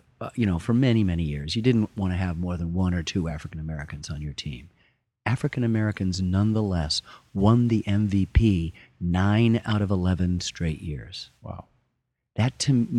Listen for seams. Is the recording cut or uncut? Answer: uncut